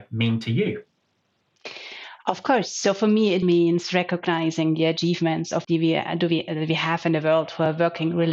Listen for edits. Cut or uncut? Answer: cut